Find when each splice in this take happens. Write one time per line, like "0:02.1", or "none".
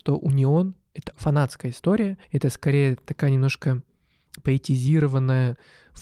0:01.1
0:02.2